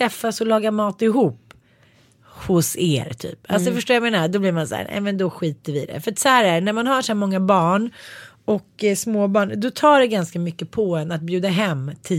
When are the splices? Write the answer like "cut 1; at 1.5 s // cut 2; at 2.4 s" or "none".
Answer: none